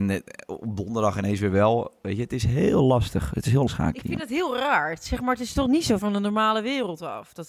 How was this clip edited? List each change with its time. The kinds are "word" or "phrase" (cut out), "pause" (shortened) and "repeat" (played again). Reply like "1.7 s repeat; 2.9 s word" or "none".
3.7 s word; 6.0 s word